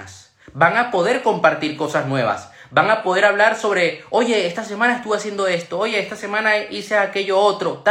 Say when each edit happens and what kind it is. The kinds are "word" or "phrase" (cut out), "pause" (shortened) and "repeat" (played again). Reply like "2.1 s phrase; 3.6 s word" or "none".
none

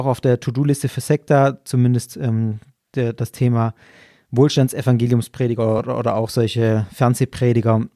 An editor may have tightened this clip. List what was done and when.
none

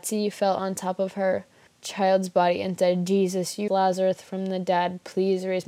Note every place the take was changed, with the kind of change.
1.7 s pause; 3.7 s word

